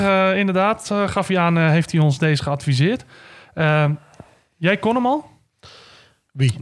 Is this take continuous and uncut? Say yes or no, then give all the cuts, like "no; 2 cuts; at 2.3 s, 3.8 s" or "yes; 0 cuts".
yes; 0 cuts